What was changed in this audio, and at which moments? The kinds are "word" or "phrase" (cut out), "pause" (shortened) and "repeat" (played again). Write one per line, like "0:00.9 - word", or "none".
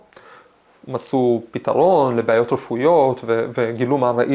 none